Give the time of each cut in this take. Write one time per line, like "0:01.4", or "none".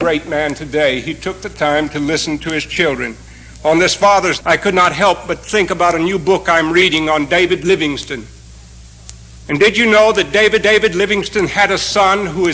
0:04.4
0:10.6